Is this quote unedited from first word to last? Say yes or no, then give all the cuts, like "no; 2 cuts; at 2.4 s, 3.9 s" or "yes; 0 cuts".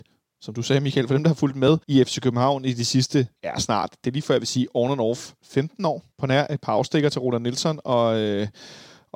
no; 4 cuts; at 1.8 s, 3.4 s, 5.4 s, 6.1 s